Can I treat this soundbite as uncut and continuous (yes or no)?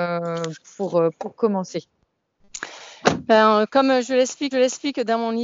no